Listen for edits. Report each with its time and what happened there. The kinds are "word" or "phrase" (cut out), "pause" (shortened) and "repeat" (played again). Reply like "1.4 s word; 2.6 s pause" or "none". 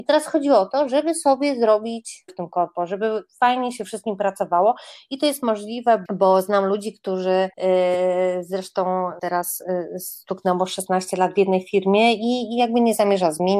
2.3 s word; 6.1 s word; 7.5 s pause; 9.2 s phrase